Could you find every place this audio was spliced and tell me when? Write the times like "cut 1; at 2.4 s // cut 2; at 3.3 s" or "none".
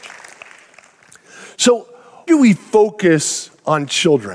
cut 1; at 2.3 s